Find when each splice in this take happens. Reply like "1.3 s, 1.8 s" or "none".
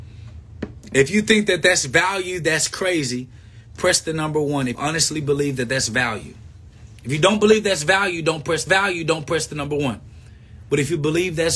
4.7 s, 8.7 s